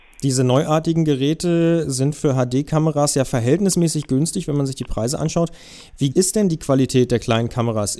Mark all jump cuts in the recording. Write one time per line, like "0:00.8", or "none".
0:06.1